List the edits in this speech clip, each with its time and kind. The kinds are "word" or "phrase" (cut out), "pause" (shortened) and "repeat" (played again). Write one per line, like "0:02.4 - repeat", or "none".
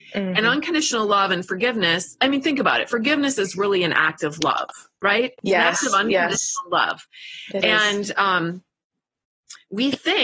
none